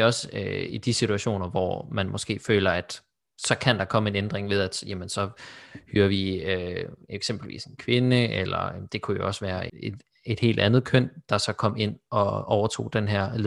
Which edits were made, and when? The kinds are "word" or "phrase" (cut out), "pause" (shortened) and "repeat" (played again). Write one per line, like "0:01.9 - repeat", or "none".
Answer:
0:09.7 - word